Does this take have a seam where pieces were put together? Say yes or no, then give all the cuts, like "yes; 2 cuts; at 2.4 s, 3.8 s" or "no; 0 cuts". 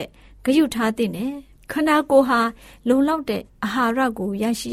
no; 0 cuts